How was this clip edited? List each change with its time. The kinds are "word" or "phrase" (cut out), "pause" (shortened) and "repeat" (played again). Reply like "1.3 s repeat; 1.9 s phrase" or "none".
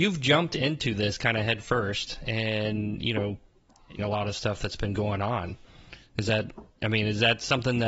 4.0 s phrase